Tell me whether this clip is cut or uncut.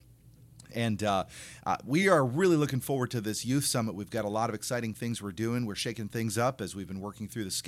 uncut